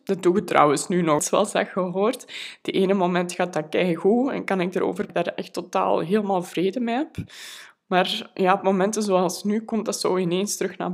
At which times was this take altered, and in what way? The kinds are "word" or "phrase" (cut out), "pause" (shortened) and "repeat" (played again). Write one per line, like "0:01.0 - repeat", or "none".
0:01.2 - word
0:05.1 - phrase